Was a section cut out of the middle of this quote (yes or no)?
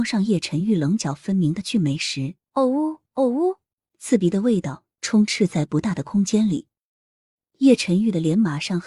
yes